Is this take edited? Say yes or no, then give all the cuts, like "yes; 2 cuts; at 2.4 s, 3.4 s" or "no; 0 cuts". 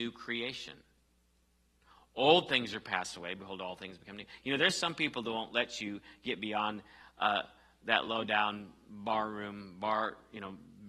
no; 0 cuts